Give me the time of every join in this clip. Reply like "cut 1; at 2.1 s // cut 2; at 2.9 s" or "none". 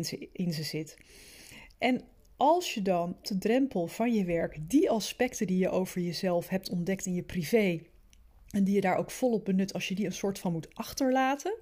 cut 1; at 3.2 s